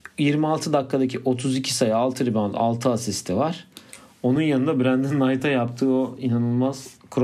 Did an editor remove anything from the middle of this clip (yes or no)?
no